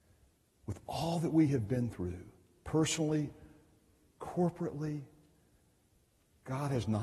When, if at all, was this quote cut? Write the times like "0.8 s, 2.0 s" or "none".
none